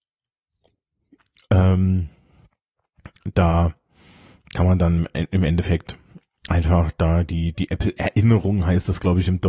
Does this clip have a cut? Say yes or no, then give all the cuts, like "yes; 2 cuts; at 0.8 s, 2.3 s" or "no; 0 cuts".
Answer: no; 0 cuts